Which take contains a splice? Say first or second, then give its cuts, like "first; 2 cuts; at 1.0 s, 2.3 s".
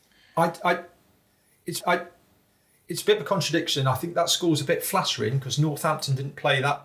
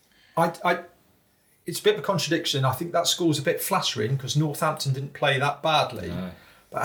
first; 1 cut; at 1.8 s